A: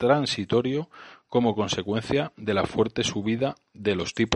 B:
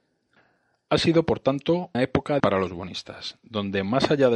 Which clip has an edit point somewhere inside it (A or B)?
B